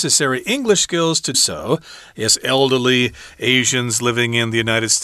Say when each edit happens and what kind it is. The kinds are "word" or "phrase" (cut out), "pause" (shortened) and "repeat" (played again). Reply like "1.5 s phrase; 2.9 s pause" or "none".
1.3 s word